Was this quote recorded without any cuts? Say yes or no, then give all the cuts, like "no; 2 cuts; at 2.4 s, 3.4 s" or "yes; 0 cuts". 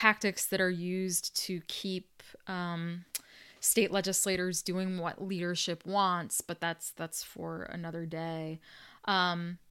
yes; 0 cuts